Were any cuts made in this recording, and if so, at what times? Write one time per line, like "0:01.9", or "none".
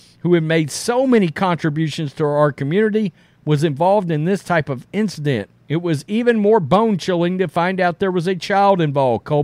0:05.6